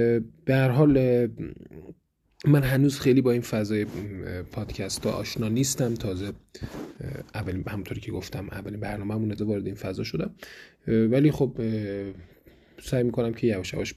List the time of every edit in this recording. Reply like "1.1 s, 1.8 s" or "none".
9.4 s